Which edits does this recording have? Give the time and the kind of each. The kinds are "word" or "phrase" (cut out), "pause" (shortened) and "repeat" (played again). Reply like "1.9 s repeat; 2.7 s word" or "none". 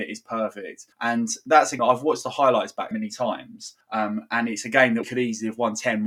0.9 s pause; 1.8 s word; 2.9 s word; 3.8 s pause; 5.0 s word